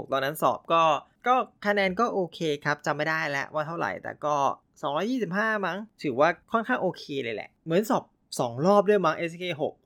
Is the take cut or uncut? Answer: uncut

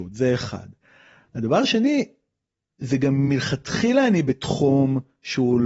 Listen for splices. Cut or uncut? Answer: uncut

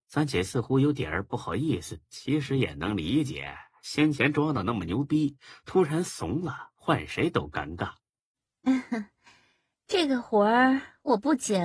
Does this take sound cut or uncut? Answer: cut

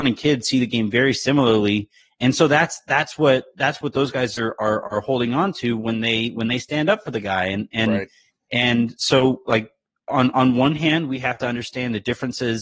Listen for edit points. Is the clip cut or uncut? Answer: uncut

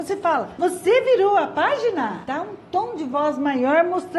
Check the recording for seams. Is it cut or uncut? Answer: uncut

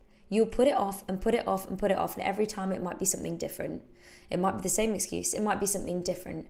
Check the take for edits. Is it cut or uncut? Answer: uncut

